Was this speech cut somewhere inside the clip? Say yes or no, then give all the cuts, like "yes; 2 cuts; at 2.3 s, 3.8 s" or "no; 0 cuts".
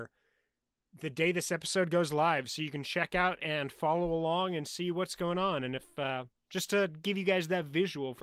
no; 0 cuts